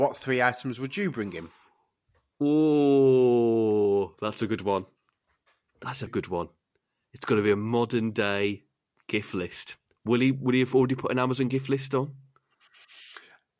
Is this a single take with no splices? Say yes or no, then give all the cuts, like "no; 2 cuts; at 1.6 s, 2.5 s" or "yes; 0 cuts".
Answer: no; 1 cut; at 6.1 s